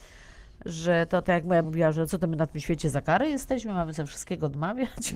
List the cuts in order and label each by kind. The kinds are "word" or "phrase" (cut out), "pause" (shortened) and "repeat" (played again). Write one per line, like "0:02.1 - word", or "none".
0:01.2 - phrase
0:01.6 - word